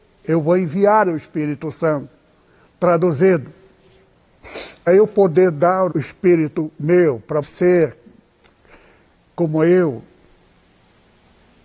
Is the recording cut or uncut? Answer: cut